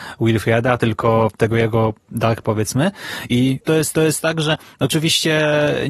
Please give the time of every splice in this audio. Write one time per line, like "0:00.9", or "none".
0:02.4
0:03.9